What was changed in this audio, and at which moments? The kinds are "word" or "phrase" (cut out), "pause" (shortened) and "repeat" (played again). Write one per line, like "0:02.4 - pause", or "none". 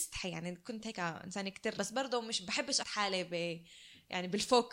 0:01.8 - word
0:02.8 - word